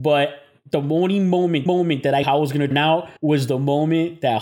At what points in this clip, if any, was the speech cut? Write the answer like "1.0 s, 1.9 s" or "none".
1.7 s, 2.2 s, 2.7 s, 3.2 s